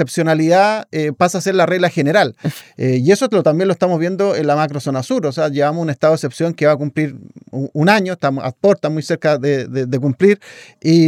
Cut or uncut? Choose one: uncut